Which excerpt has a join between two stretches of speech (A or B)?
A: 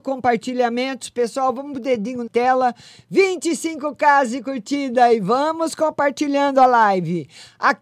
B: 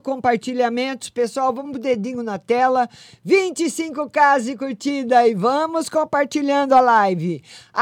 A